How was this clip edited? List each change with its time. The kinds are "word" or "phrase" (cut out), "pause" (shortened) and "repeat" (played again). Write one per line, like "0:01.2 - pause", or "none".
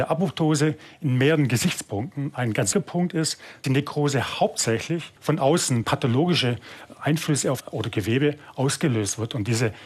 0:02.7 - word
0:03.6 - word
0:05.2 - pause
0:05.8 - word
0:07.6 - phrase